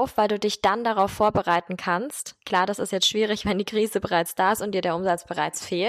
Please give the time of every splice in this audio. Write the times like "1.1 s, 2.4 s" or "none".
2.4 s